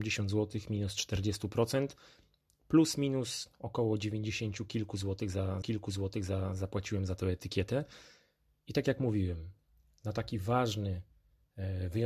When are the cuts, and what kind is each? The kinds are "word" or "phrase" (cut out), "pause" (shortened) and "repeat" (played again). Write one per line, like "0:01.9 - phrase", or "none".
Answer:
0:05.6 - repeat